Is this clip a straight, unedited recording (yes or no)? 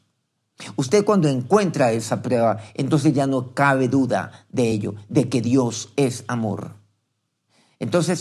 yes